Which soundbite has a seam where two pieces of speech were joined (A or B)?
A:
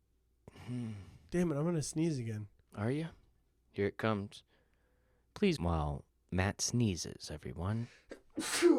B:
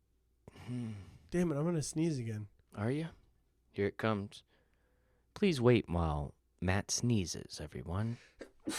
A